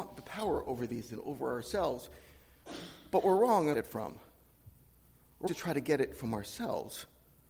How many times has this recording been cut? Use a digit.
3